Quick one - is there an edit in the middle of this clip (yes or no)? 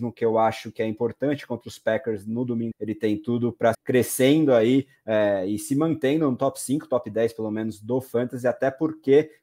yes